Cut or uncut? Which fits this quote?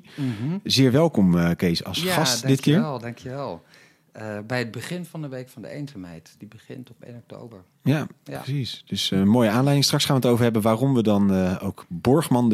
uncut